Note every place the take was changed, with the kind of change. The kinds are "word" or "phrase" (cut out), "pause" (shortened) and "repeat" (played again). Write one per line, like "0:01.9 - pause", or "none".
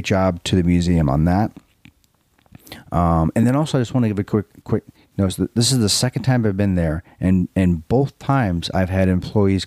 none